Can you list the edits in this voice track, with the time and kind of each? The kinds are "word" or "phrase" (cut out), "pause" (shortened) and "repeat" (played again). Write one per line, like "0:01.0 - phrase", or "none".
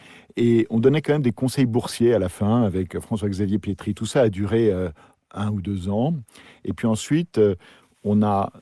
none